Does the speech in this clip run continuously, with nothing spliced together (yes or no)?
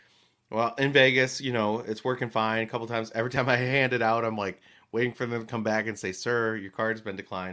yes